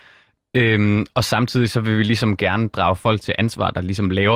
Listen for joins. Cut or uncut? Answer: uncut